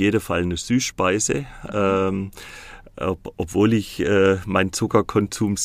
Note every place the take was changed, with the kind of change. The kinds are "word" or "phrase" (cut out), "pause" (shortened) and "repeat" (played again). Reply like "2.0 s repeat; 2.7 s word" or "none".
none